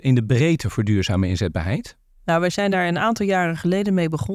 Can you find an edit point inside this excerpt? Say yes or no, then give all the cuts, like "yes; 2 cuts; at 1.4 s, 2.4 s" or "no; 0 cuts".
no; 0 cuts